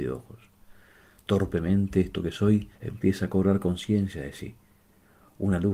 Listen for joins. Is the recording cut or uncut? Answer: cut